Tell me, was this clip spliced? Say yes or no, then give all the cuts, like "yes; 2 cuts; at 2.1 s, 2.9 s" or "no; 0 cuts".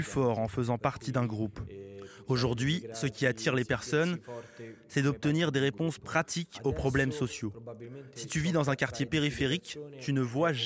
no; 0 cuts